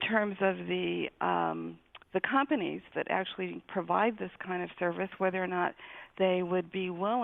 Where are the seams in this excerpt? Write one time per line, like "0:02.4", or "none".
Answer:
0:02.0